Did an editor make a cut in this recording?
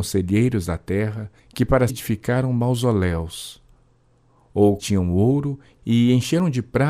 yes; 3 cuts; at 1.4 s, 1.9 s, 4.8 s

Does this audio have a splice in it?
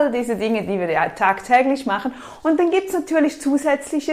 no; 0 cuts

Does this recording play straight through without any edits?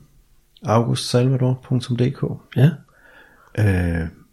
yes; 0 cuts

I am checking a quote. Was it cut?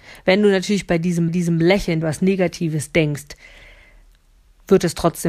yes; 2 cuts; at 1.3 s, 2.0 s

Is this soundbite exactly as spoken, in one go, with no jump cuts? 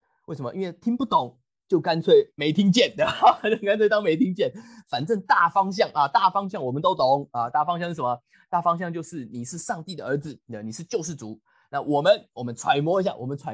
yes; 0 cuts

